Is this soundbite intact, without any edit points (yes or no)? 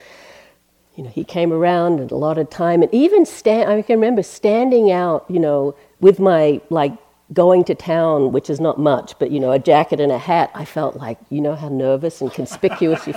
yes